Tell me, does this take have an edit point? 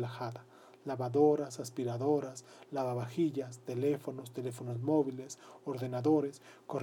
no; 0 cuts

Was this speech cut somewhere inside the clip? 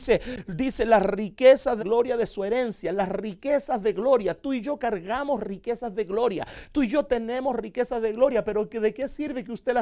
yes; 1 cut; at 1.8 s

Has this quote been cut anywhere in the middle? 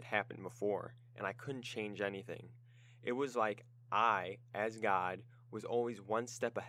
no; 0 cuts

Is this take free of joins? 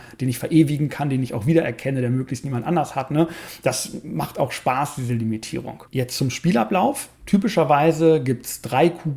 no; 1 cut; at 5.9 s

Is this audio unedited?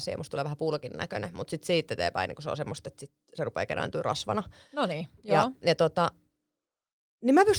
yes; 0 cuts

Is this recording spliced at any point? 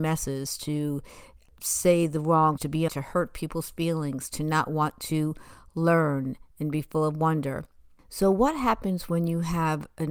yes; 2 cuts; at 2.6 s, 2.9 s

